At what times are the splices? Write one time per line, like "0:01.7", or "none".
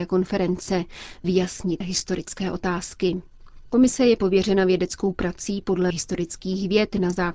0:01.2
0:01.8
0:05.9